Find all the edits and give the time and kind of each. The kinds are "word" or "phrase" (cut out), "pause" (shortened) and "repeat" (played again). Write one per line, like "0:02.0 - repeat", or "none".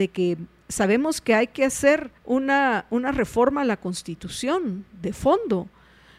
0:02.2 - pause